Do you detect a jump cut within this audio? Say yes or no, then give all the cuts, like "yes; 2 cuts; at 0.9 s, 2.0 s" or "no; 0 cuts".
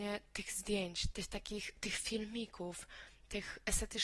yes; 1 cut; at 1.1 s